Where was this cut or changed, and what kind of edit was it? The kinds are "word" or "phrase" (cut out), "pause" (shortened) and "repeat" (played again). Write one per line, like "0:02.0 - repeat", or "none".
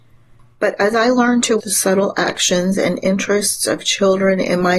0:01.6 - word